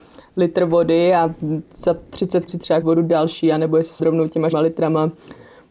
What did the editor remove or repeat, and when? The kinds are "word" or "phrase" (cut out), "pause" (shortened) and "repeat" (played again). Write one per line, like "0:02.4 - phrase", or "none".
0:02.5 - word
0:02.8 - word
0:04.0 - word
0:04.5 - word